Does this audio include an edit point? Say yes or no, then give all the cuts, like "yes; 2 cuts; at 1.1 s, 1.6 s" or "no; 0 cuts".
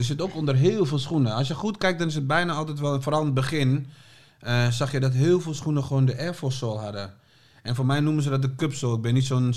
no; 0 cuts